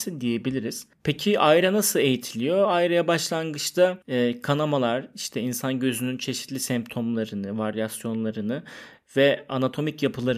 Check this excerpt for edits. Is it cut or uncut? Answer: cut